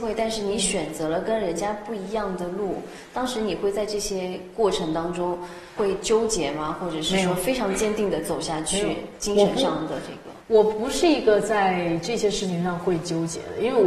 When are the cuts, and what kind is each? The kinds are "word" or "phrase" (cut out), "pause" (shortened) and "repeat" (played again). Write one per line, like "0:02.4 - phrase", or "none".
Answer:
0:05.8 - word
0:10.4 - pause